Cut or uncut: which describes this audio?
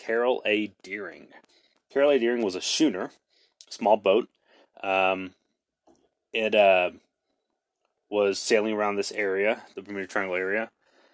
uncut